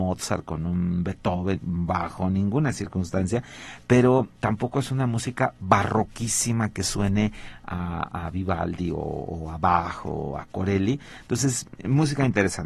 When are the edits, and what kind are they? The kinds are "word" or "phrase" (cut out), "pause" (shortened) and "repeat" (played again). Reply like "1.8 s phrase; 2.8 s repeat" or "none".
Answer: none